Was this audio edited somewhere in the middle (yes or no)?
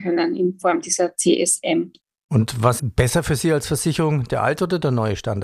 yes